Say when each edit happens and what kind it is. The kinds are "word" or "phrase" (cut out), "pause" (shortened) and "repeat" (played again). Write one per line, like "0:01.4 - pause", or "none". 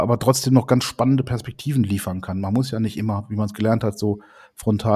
none